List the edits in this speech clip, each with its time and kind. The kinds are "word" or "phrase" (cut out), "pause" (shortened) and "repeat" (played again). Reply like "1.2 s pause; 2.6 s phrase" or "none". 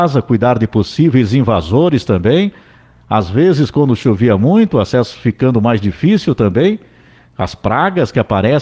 none

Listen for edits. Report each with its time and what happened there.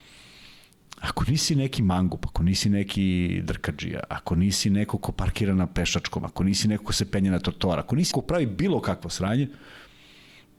8.1 s word

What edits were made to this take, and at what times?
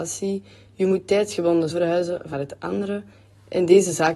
1.7 s word; 2.3 s phrase

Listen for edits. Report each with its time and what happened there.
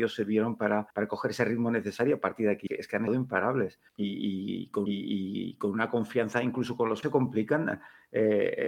0.9 s pause; 2.7 s word; 3.1 s word; 3.9 s pause; 4.9 s repeat; 7.0 s word

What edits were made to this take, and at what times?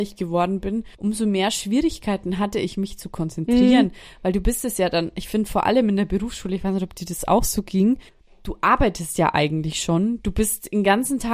0.9 s pause; 8.1 s pause

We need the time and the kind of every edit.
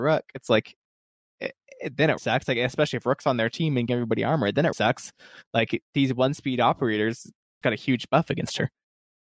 1.4 s word; 2.2 s word; 3.9 s word; 4.7 s word; 7.6 s word

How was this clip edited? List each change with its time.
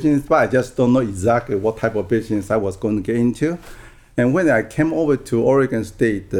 none

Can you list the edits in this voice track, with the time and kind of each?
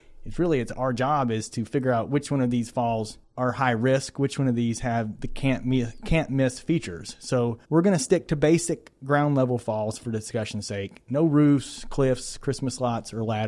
7.6 s pause

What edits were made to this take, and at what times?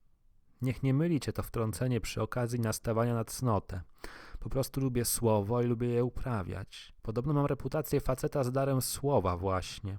7.0 s pause

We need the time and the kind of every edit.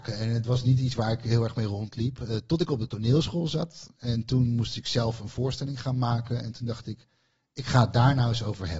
none

